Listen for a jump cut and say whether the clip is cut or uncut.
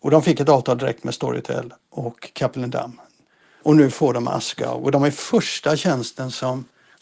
uncut